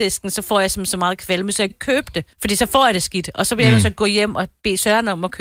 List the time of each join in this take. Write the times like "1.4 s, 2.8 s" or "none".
1.7 s, 2.3 s